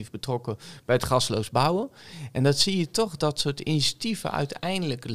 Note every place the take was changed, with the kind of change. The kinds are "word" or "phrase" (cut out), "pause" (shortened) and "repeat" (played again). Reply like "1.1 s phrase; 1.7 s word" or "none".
3.2 s word